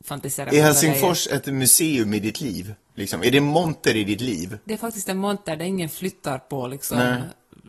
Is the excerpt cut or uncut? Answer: uncut